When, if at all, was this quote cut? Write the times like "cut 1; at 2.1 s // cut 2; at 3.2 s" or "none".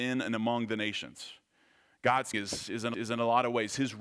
cut 1; at 2.3 s // cut 2; at 2.9 s